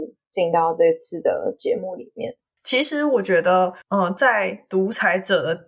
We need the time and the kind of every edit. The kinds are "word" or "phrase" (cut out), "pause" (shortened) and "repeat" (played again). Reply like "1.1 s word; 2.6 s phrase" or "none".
3.8 s pause